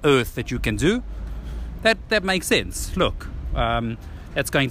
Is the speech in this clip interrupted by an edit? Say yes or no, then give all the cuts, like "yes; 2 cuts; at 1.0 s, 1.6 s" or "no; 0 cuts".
no; 0 cuts